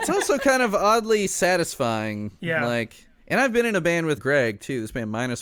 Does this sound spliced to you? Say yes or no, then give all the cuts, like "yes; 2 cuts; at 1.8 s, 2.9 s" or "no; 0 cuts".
yes; 2 cuts; at 3.2 s, 4.2 s